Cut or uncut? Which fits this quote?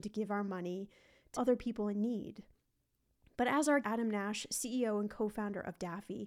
cut